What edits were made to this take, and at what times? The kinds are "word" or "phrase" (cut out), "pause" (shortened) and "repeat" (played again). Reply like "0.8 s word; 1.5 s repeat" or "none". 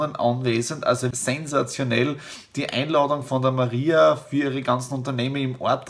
1.1 s word